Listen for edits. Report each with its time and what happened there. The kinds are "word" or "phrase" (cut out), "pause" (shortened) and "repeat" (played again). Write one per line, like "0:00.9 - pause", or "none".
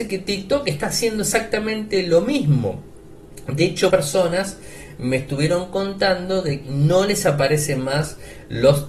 0:03.9 - word
0:06.6 - word